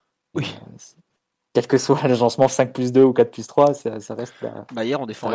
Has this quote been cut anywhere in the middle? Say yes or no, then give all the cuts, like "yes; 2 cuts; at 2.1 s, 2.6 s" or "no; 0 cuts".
no; 0 cuts